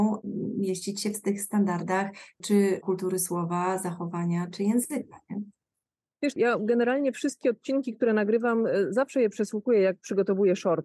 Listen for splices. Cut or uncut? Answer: uncut